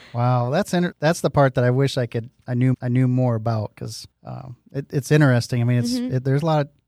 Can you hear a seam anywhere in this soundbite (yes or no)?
yes